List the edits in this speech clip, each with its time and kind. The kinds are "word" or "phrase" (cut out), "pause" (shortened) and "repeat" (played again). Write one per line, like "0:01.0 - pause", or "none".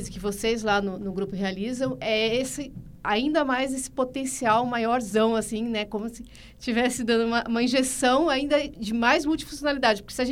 none